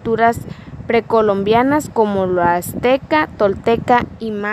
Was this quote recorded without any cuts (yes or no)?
yes